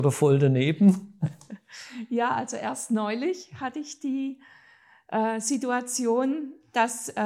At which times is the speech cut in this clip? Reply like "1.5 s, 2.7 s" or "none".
none